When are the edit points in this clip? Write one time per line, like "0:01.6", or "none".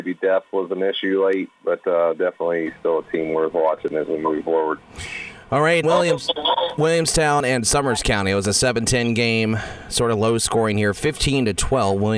0:05.8